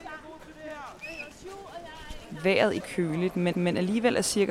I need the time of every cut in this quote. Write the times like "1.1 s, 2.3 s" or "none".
2.8 s, 3.5 s